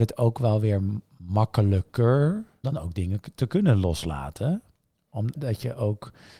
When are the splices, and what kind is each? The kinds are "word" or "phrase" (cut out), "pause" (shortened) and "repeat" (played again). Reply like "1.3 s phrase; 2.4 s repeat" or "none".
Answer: 2.6 s word; 5.3 s word